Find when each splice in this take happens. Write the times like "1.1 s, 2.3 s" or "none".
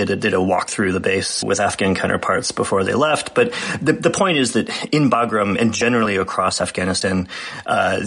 1.4 s